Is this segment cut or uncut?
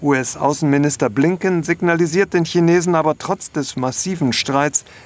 uncut